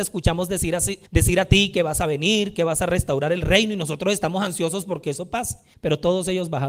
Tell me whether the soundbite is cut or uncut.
cut